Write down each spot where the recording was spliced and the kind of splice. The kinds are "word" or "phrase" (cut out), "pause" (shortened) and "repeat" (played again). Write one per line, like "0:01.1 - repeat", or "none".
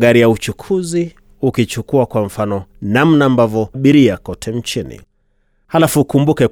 0:02.7 - pause
0:03.7 - word